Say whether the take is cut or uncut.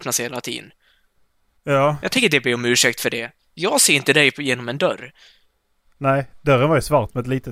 cut